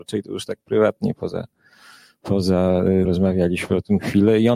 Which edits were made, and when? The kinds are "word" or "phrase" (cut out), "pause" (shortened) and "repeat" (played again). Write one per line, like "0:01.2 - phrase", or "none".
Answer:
0:03.0 - word